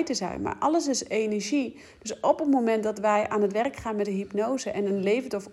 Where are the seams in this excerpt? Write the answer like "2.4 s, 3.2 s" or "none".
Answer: none